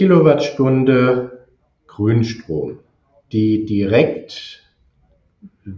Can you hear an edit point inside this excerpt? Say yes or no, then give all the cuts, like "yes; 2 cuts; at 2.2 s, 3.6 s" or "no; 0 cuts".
no; 0 cuts